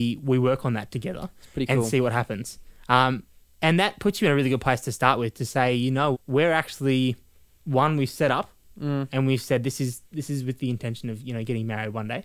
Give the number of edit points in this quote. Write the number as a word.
one